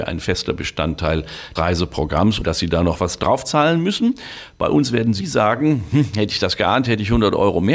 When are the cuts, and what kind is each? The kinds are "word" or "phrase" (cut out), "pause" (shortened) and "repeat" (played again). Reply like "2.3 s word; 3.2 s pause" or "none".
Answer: 1.6 s word; 2.4 s word; 5.2 s word

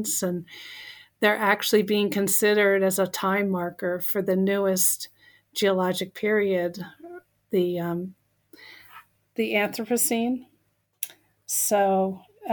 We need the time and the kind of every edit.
none

